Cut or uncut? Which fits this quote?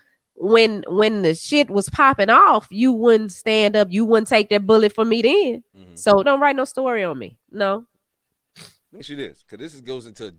cut